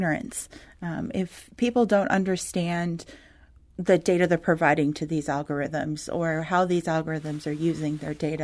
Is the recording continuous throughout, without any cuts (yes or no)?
yes